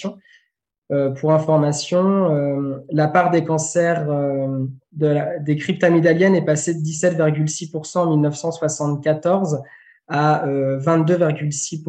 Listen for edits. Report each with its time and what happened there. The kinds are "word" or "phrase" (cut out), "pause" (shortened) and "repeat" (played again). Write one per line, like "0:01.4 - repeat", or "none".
none